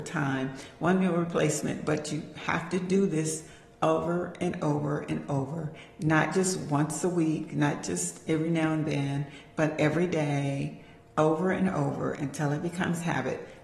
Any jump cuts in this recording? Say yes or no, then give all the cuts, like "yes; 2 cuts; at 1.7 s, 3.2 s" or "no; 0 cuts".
no; 0 cuts